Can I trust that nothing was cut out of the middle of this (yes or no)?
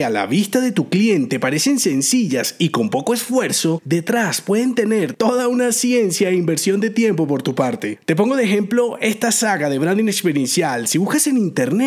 yes